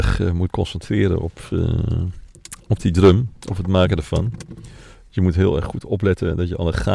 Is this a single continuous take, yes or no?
yes